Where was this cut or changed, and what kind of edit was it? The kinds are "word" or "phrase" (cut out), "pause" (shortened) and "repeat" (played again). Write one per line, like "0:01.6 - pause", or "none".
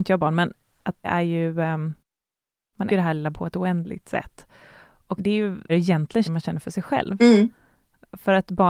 0:01.0 - word
0:02.9 - word
0:03.3 - word
0:05.2 - word
0:05.7 - word
0:06.3 - word